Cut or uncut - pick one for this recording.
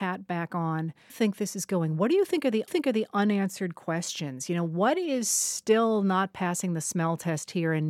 cut